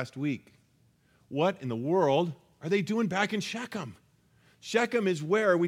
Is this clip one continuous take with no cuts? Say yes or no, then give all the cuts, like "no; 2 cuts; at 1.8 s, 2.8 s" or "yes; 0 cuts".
yes; 0 cuts